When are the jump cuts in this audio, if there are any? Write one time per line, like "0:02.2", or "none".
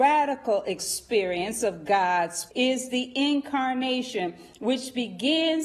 0:02.5

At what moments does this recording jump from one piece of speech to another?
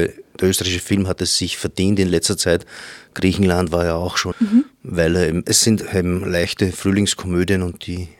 0:04.3

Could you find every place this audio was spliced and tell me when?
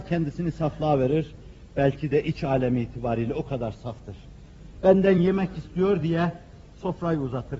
none

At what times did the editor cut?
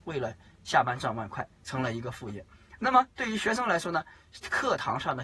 0:01.5

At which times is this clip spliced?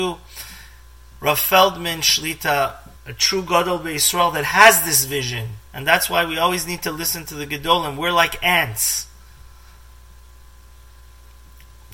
0:03.0
0:05.7

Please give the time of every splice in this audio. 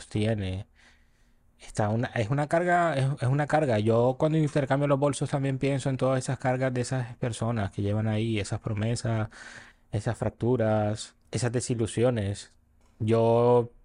0:09.7
0:11.2

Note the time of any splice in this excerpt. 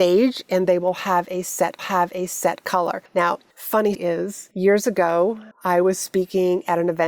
0:01.8
0:03.9
0:05.5

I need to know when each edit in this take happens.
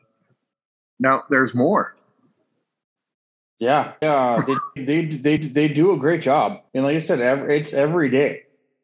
0:04.0
0:04.8
0:05.4
0:06.7

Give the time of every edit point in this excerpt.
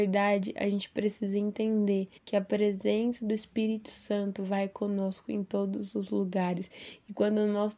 0:02.2

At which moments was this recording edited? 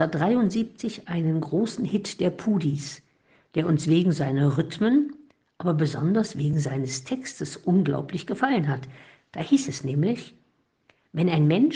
none

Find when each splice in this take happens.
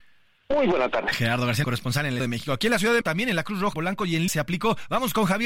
0:01.6
0:02.2
0:03.0
0:03.7
0:04.3

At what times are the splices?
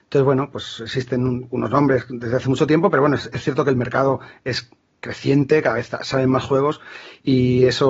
none

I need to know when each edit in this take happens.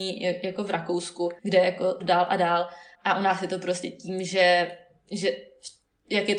0:01.4
0:02.0
0:02.9

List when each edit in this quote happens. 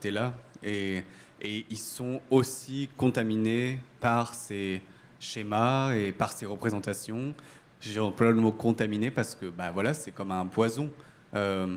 none

